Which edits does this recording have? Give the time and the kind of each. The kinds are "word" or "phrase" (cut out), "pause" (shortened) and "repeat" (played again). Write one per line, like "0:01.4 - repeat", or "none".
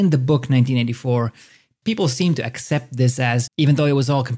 0:03.5 - word